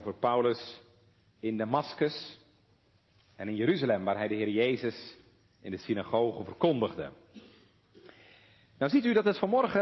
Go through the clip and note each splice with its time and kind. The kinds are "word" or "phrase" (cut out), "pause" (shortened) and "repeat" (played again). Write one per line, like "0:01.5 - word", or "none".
none